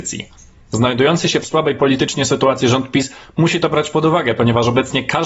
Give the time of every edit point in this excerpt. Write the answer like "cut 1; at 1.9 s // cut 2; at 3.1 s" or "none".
none

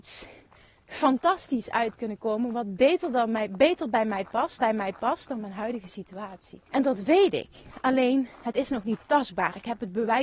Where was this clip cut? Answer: cut 1; at 4.6 s // cut 2; at 6.7 s

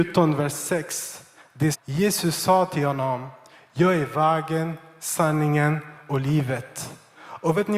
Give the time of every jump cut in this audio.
cut 1; at 1.7 s

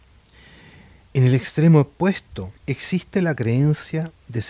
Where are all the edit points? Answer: cut 1; at 2.6 s

